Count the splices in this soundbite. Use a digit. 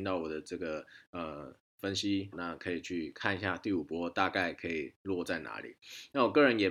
1